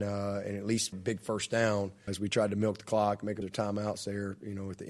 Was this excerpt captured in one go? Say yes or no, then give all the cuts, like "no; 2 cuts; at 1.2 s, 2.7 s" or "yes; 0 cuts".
no; 3 cuts; at 0.9 s, 2.1 s, 3.4 s